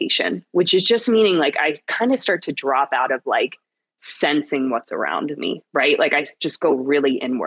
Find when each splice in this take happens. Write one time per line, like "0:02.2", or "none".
none

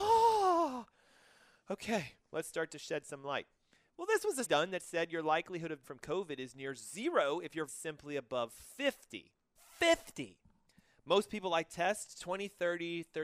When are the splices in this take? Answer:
0:02.2
0:04.5
0:05.8
0:07.7
0:09.6

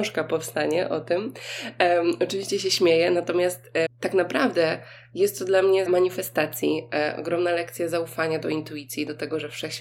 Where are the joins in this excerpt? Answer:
0:03.9
0:05.9

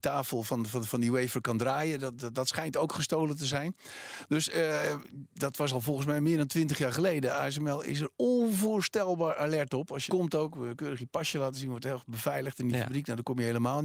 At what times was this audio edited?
0:08.1
0:10.1

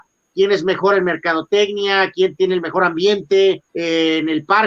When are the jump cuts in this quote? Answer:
0:03.7

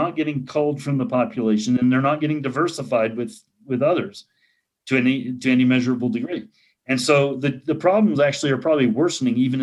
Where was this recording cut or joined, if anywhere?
none

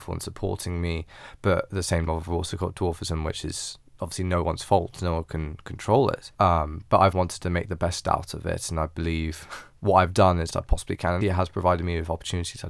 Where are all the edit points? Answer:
0:02.1
0:06.3
0:07.1
0:09.8
0:10.5
0:11.2

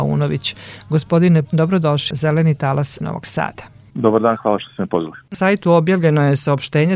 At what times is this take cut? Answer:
0:01.5
0:02.1
0:03.0
0:05.3

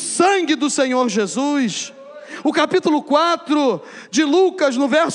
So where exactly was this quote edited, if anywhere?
none

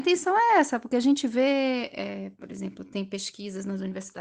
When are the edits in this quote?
none

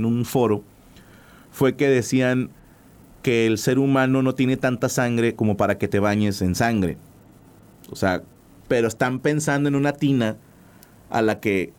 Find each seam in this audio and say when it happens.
none

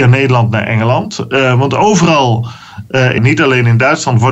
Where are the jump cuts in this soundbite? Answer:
0:03.2

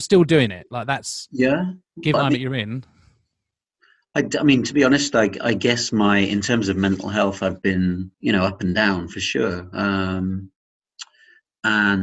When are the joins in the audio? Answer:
0:02.1
0:08.1

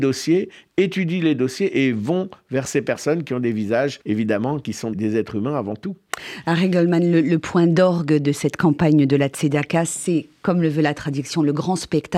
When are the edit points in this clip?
0:04.0
0:04.9

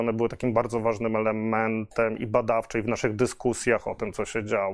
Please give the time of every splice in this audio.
none

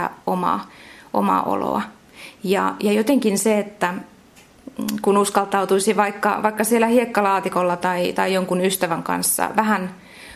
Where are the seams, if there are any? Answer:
none

